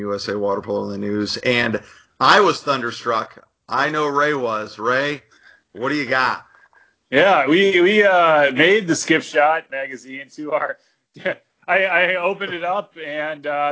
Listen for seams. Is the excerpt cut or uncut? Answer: uncut